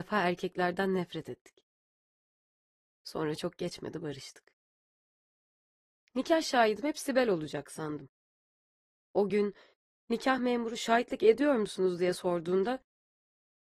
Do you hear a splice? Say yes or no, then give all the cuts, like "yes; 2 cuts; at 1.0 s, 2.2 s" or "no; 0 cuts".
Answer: no; 0 cuts